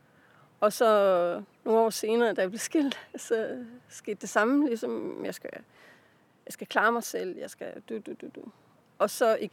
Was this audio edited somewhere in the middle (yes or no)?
no